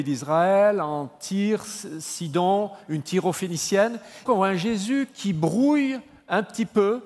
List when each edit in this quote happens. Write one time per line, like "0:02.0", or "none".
0:04.3